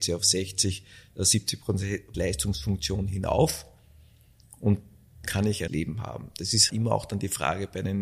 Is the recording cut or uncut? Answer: cut